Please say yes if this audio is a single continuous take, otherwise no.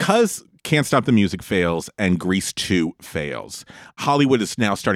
yes